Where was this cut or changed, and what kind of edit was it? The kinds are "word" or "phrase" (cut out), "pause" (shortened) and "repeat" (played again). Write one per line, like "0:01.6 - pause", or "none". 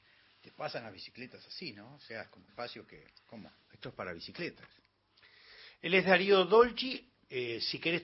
0:02.5 - phrase
0:03.1 - pause